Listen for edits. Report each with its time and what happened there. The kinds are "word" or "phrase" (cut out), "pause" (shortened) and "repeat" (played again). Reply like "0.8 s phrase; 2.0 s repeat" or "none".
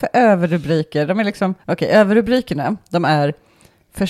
1.6 s pause